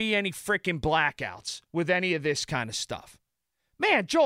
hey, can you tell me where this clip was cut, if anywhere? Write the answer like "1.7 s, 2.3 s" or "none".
none